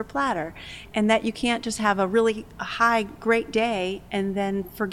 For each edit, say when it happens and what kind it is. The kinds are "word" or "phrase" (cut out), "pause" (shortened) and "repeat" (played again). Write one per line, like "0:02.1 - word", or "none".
0:00.9 - word

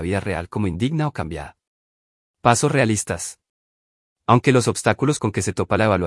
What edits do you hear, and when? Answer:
none

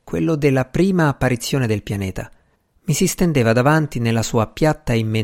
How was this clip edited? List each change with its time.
0:02.5 - pause

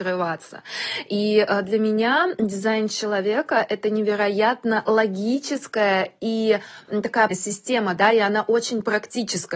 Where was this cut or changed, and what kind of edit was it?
0:07.3 - word

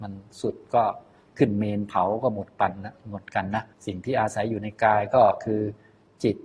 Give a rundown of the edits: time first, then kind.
0:03.7 - pause

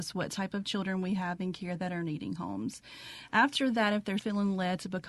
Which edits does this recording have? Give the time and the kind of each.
0:04.2 - word

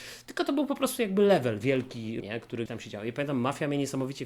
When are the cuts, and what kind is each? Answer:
0:01.6 - word
0:02.2 - word
0:02.7 - word

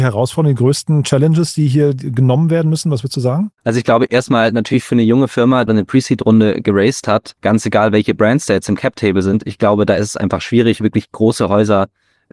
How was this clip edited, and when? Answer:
0:03.6 - pause
0:05.7 - phrase
0:07.4 - pause

